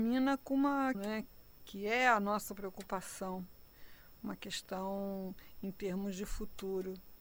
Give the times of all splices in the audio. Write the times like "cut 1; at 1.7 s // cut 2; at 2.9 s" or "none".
cut 1; at 0.9 s